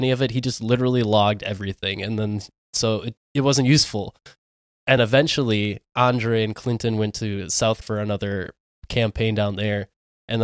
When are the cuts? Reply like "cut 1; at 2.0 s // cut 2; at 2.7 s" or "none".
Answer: cut 1; at 3.2 s // cut 2; at 5.0 s // cut 3; at 7.8 s